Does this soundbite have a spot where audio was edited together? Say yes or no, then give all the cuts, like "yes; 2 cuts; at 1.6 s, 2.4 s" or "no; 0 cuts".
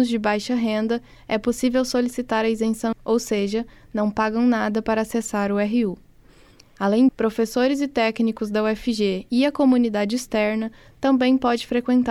yes; 2 cuts; at 2.9 s, 7.1 s